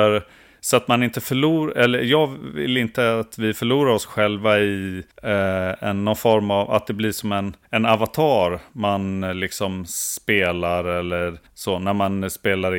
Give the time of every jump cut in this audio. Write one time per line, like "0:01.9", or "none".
0:05.1
0:07.6
0:11.5